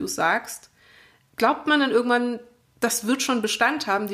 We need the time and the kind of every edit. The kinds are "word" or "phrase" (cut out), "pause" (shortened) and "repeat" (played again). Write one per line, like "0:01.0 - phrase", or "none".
none